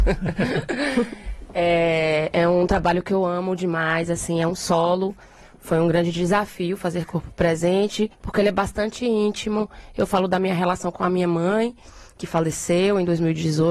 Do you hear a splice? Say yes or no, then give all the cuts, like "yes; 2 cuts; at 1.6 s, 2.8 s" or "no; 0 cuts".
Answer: yes; 1 cut; at 8.1 s